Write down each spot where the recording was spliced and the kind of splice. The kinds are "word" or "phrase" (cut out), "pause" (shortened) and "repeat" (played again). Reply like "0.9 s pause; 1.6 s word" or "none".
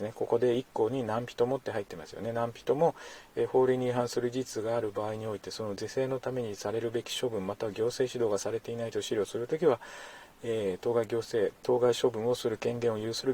11.6 s pause